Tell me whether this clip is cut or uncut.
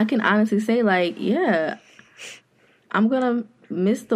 uncut